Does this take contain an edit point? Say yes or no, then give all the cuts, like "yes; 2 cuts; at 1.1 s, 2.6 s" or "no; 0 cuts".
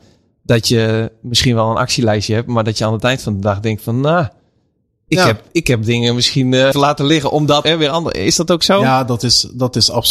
yes; 2 cuts; at 6.7 s, 7.6 s